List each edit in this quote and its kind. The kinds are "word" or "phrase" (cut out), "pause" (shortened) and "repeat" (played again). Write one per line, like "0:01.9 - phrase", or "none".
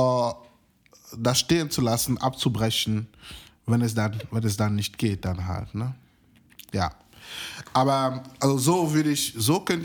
none